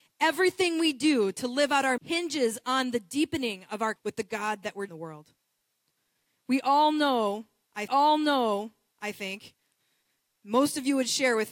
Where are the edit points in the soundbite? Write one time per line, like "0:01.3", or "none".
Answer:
0:02.0
0:04.0
0:04.9
0:07.9